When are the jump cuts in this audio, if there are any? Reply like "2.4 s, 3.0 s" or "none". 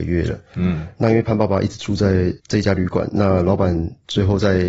2.4 s